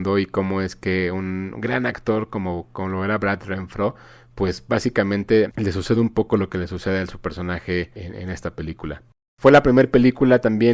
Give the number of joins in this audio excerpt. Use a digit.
0